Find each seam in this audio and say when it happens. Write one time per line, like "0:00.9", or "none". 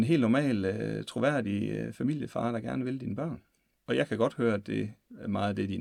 0:03.7